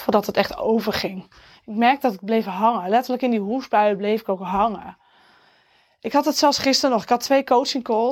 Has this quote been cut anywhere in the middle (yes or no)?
no